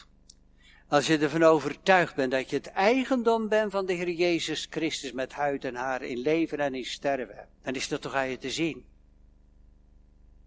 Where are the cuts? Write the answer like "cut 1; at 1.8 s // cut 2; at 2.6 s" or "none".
cut 1; at 7.6 s